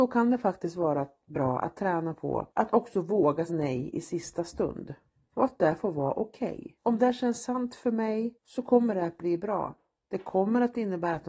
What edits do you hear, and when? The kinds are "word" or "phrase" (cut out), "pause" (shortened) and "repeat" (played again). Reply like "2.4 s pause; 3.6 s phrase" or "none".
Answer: 2.5 s pause; 3.5 s word; 6.8 s pause; 8.4 s pause